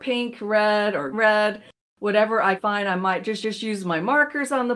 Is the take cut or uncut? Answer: cut